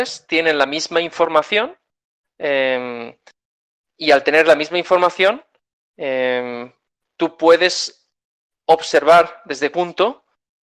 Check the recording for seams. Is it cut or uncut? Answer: cut